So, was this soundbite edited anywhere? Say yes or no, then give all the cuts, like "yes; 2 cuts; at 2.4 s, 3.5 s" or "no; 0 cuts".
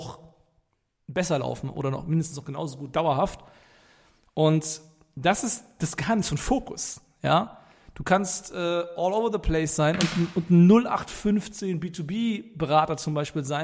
no; 0 cuts